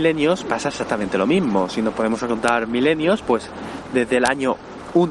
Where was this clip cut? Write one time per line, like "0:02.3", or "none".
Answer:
none